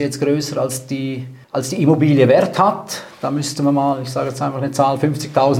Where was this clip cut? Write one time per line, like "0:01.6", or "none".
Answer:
0:01.4